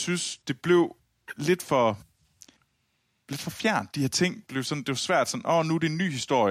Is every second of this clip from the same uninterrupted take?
yes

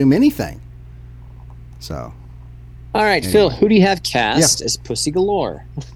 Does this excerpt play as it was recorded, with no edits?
yes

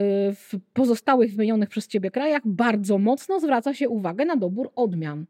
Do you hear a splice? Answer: no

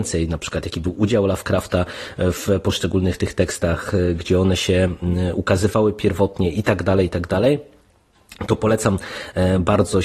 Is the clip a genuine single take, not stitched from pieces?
yes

